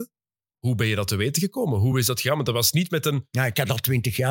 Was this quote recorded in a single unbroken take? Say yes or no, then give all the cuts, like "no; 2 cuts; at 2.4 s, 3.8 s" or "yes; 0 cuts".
yes; 0 cuts